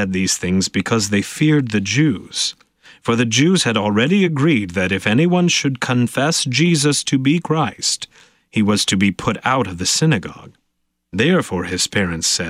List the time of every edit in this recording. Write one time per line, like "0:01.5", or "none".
none